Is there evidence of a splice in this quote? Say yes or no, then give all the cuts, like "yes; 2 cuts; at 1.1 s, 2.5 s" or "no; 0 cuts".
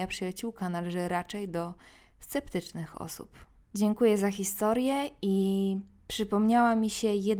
no; 0 cuts